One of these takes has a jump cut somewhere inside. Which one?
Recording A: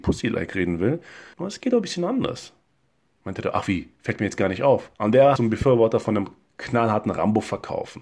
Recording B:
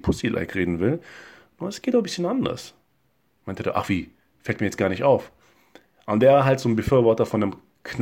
A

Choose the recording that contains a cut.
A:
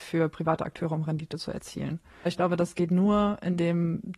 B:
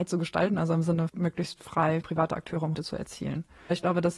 B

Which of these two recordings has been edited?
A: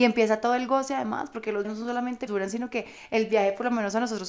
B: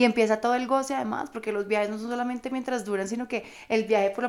A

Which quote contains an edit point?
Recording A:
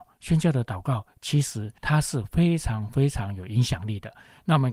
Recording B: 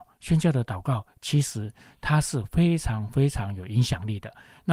A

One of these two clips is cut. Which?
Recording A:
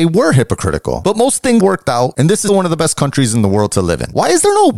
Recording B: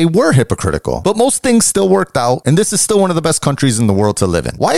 A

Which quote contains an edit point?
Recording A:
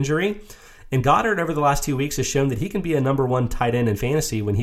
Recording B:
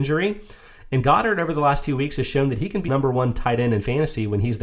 B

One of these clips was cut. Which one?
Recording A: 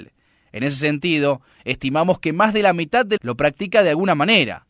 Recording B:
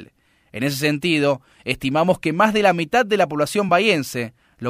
A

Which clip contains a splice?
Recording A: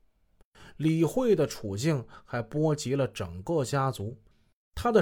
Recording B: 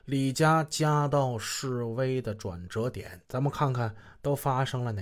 B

